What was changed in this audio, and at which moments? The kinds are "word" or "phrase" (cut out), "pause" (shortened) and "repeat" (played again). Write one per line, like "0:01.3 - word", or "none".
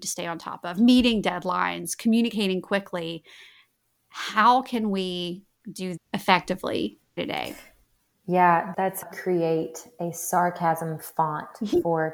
0:06.0 - word
0:07.2 - word
0:08.7 - word
0:09.1 - phrase